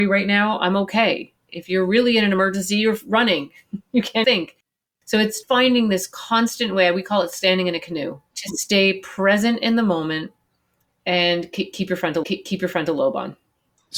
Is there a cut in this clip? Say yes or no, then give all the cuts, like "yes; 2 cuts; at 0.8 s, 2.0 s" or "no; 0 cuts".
yes; 4 cuts; at 1.4 s, 4.2 s, 5.4 s, 12.2 s